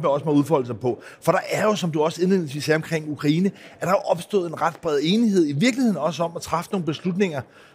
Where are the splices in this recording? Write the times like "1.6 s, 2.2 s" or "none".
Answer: none